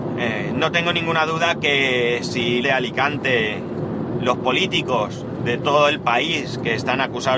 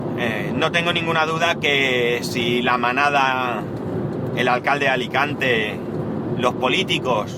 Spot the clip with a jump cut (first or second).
first